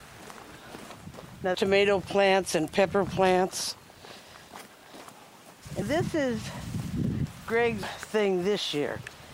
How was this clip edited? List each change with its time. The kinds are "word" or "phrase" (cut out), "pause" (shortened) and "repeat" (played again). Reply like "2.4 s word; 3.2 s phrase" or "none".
1.5 s word; 5.8 s word; 7.8 s word